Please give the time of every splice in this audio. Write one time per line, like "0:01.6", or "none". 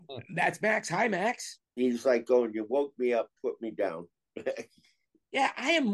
0:01.7